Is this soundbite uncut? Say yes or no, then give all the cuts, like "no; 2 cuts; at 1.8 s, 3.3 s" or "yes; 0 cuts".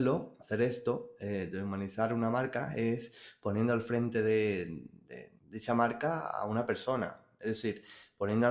no; 1 cut; at 5.4 s